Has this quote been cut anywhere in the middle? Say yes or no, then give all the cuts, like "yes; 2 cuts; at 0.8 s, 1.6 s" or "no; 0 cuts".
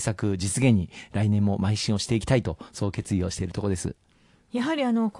no; 0 cuts